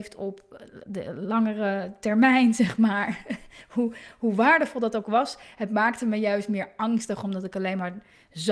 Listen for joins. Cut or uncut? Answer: uncut